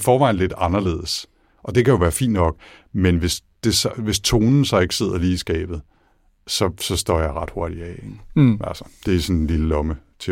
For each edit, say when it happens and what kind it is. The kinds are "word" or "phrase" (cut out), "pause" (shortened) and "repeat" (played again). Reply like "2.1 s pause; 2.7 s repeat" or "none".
none